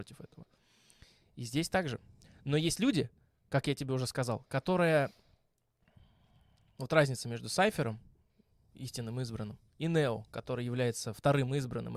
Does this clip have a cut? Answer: no; 0 cuts

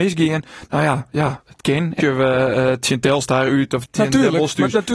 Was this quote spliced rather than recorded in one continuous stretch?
yes; 2 cuts; at 2.0 s, 3.8 s

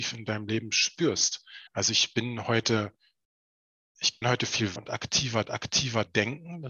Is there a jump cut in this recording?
yes; 4 cuts; at 1.7 s, 4.2 s, 4.8 s, 5.5 s

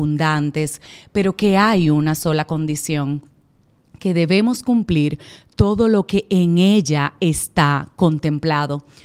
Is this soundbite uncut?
yes; 0 cuts

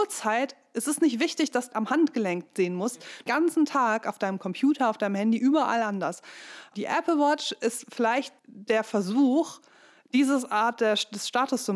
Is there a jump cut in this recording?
yes; 3 cuts; at 1.7 s, 3.3 s, 8.4 s

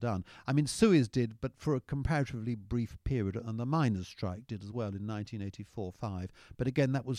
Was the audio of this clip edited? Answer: no; 0 cuts

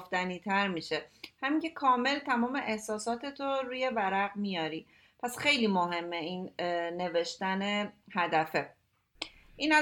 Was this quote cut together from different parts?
no; 0 cuts

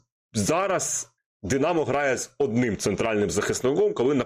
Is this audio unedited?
no; 1 cut; at 1.2 s

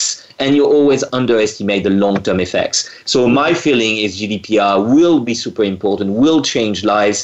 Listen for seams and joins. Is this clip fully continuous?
yes; 0 cuts

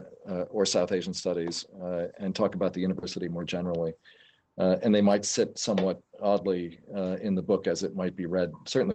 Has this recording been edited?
no; 0 cuts

